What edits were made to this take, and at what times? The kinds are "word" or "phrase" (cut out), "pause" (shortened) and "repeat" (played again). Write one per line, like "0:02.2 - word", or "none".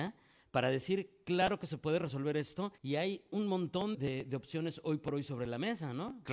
0:02.8 - pause
0:03.9 - word